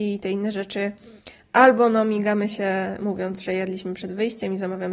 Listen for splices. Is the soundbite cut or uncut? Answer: uncut